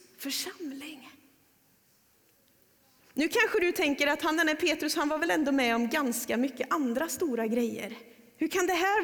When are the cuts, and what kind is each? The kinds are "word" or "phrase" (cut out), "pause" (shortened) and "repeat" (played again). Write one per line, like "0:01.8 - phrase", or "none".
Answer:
none